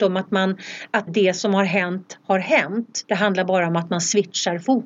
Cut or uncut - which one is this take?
cut